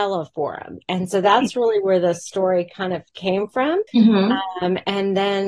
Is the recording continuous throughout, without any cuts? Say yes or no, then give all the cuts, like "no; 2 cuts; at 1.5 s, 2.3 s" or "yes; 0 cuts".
no; 1 cut; at 3.9 s